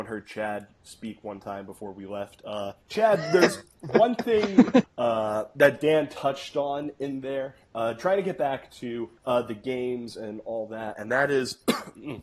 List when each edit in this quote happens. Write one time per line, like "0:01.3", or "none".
0:02.8
0:04.8
0:09.2